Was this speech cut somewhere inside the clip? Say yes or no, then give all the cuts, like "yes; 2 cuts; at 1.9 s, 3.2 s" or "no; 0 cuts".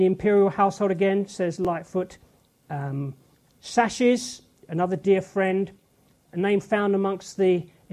yes; 2 cuts; at 3.5 s, 6.1 s